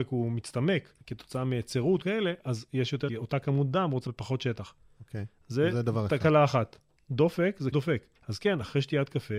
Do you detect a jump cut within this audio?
yes; 8 cuts; at 1.0 s, 2.0 s, 3.1 s, 4.1 s, 4.8 s, 7.0 s, 7.7 s, 8.2 s

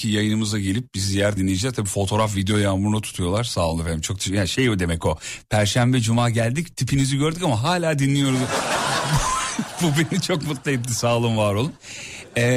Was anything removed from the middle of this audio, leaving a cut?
yes; 1 cut; at 1.4 s

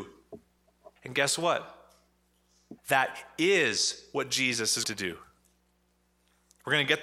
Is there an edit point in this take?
yes; 3 cuts; at 1.0 s, 2.8 s, 4.8 s

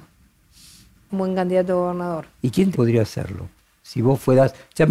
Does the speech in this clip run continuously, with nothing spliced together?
no; 3 cuts; at 1.1 s, 2.4 s, 2.7 s

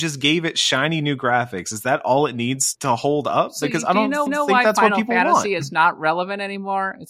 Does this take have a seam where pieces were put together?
yes; 2 cuts; at 2.7 s, 4.3 s

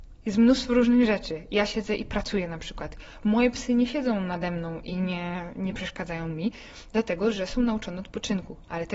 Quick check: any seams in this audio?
no; 0 cuts

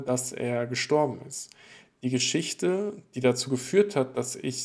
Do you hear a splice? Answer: no; 0 cuts

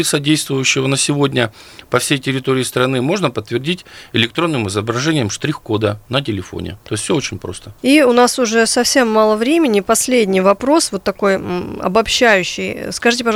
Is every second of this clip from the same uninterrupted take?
yes; 0 cuts

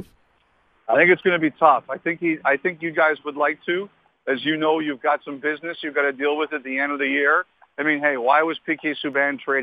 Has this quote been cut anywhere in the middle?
no; 0 cuts

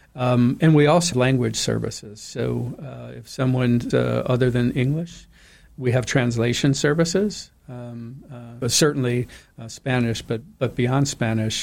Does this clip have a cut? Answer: yes; 3 cuts; at 1.1 s, 3.9 s, 8.6 s

